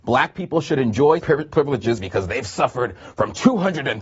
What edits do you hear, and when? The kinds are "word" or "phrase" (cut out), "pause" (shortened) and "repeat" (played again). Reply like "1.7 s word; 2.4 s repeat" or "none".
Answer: 1.2 s word